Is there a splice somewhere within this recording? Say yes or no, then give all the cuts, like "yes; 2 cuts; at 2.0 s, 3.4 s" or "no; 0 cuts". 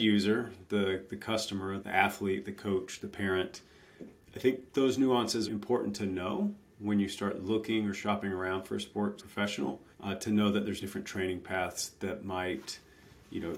yes; 6 cuts; at 1.8 s, 4.1 s, 5.5 s, 9.2 s, 9.9 s, 10.8 s